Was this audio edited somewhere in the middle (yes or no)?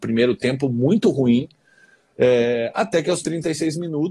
no